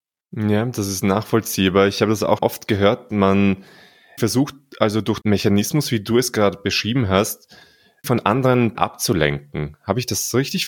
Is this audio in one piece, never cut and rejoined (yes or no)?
no